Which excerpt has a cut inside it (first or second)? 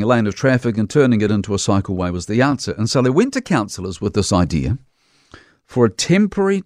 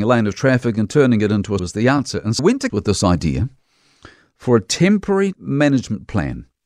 second